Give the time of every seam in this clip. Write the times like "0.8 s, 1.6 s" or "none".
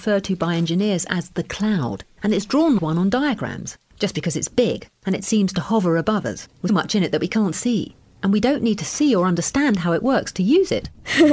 2.8 s, 6.7 s